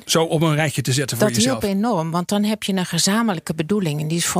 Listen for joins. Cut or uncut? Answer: uncut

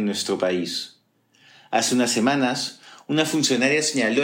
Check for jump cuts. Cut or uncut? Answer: uncut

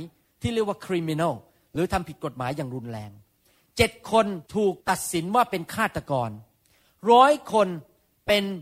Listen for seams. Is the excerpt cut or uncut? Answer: cut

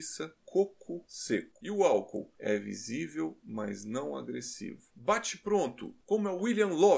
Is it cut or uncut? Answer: uncut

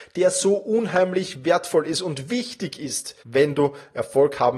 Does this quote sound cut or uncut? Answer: cut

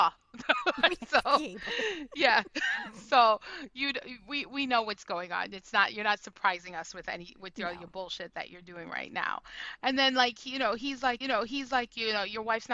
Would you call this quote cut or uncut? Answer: cut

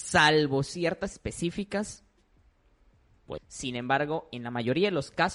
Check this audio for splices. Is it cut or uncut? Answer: cut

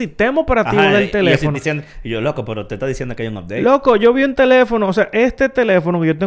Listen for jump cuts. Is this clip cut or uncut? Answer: cut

